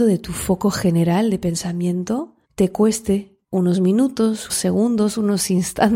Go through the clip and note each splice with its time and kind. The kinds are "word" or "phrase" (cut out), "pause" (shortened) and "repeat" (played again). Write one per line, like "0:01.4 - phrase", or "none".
0:02.4 - pause
0:03.4 - pause
0:04.5 - word